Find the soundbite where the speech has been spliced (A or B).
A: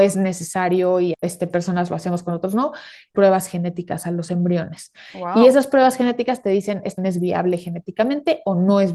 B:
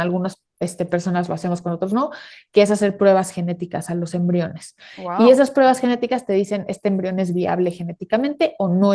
A